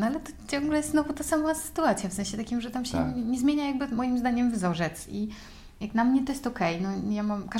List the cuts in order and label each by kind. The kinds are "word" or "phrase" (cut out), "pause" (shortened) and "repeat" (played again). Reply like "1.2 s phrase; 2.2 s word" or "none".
none